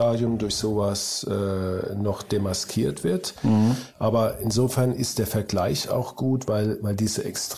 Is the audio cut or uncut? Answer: uncut